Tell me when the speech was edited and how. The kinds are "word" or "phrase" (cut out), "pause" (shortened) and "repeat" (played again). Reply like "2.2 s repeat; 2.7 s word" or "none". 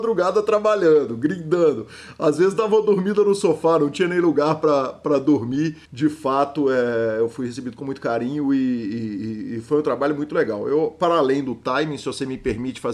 5.8 s pause